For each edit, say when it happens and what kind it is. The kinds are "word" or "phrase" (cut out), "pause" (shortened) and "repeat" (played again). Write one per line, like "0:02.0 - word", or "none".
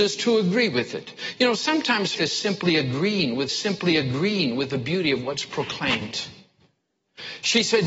0:02.1 - word
0:03.5 - repeat